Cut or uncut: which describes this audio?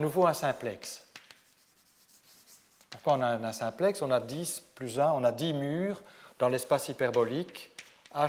uncut